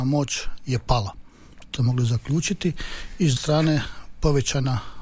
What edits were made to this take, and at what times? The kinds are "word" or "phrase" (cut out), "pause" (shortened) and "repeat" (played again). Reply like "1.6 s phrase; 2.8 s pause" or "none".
1.8 s word; 3.4 s word